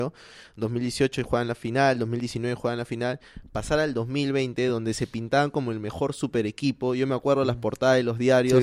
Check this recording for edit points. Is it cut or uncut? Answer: uncut